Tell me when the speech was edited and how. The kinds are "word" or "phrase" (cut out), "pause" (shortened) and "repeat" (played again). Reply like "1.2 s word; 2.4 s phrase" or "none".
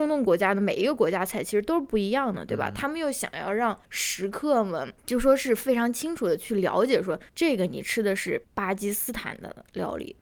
3.8 s pause; 5.0 s pause; 7.3 s pause; 8.4 s pause